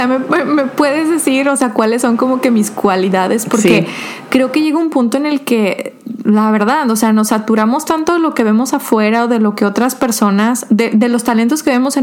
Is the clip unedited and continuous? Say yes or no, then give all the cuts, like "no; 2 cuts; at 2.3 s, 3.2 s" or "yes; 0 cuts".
yes; 0 cuts